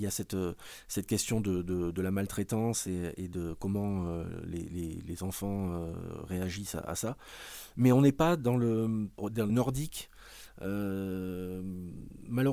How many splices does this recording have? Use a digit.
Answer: 1